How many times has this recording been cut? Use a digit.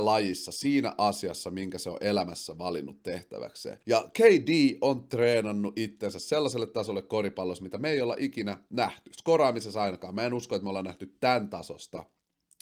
1